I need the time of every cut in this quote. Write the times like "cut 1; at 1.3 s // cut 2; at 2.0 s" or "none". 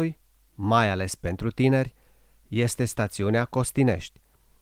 none